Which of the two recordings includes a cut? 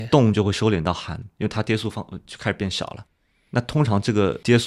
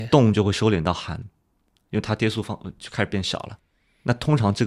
first; 1 cut; at 1.3 s

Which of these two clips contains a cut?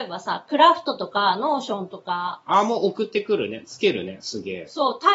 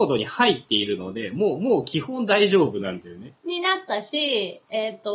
second; 1 cut; at 3.4 s

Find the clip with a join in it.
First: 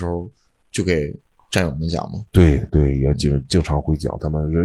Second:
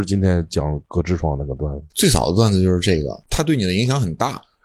second; 1 cut; at 1.9 s

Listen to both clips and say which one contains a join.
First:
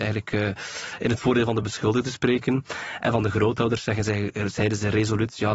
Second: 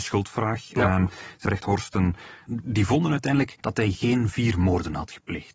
second; 3 cuts; at 1.5 s, 2.5 s, 3.6 s

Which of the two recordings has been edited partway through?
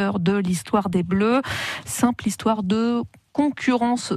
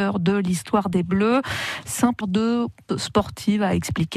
second; 2 cuts; at 2.2 s, 2.9 s

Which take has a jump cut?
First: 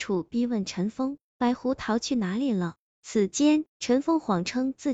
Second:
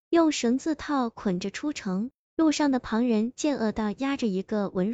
first; 1 cut; at 3.7 s

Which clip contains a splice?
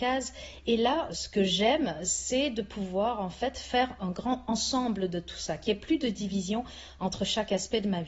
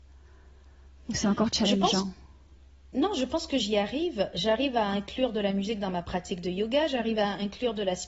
first; 2 cuts; at 1.1 s, 4.0 s

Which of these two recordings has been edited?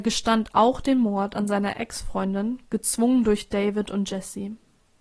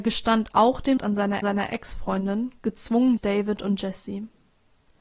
second; 3 cuts; at 1.0 s, 1.4 s, 3.2 s

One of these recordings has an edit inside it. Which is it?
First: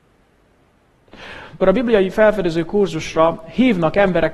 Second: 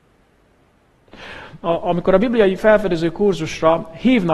first; 1 cut; at 1.6 s

